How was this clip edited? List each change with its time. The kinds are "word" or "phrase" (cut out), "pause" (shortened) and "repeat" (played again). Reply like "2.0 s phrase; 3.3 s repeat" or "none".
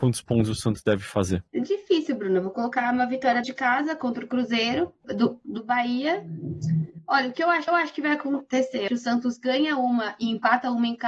1.5 s pause; 3.4 s word; 5.0 s phrase; 7.7 s repeat; 8.9 s word